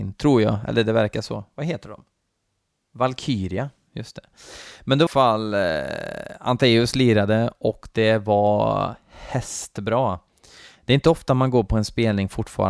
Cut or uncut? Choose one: cut